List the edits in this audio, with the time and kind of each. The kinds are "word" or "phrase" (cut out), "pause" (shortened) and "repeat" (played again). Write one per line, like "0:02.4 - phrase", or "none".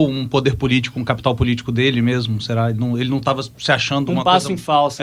none